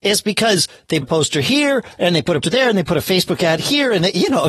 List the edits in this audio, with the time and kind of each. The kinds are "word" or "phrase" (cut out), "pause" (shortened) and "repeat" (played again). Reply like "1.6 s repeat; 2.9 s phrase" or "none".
1.0 s word; 2.4 s word